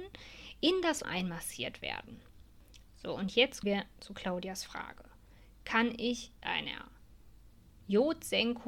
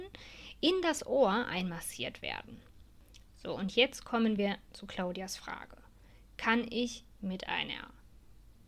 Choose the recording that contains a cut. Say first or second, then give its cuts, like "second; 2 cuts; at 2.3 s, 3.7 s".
first; 3 cuts; at 1.0 s, 3.6 s, 6.4 s